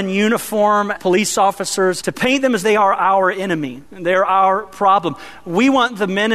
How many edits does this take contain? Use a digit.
4